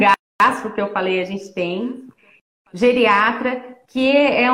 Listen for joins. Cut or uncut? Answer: uncut